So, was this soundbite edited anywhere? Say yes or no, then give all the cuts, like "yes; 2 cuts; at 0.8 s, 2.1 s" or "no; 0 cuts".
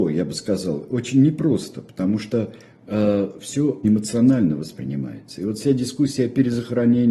yes; 1 cut; at 3.8 s